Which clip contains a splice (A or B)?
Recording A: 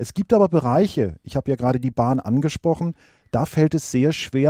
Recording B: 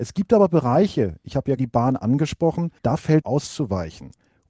B